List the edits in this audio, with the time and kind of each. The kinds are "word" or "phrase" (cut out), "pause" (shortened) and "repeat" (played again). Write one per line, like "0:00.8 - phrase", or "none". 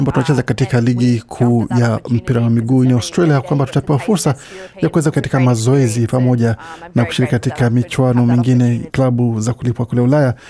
0:02.8 - word
0:05.1 - word
0:08.9 - word